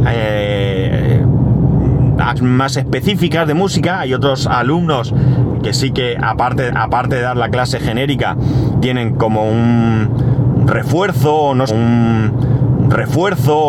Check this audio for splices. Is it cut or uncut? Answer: cut